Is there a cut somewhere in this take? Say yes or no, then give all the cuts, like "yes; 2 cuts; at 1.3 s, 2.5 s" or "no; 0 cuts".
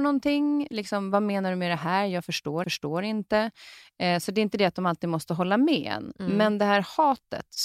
yes; 1 cut; at 2.6 s